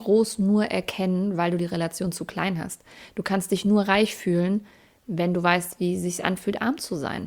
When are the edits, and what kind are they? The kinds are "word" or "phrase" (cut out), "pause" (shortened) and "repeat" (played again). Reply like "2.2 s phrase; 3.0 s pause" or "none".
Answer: none